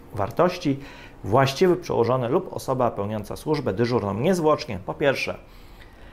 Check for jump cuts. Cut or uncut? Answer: uncut